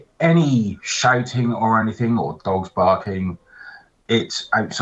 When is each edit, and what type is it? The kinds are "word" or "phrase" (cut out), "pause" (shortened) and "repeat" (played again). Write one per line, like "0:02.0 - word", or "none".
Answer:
none